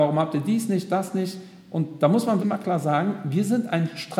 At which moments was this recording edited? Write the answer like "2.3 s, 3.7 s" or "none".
2.4 s